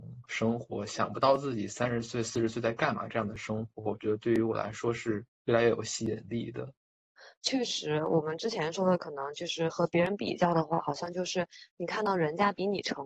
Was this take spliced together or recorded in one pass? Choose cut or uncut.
cut